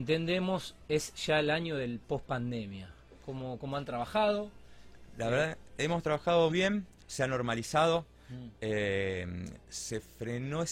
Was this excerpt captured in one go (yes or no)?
no